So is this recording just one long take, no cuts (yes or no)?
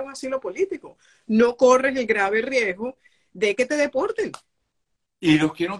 yes